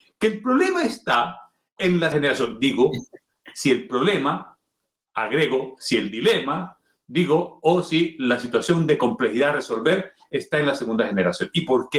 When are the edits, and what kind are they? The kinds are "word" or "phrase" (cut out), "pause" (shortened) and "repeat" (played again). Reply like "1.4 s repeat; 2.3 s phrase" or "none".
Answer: 2.1 s word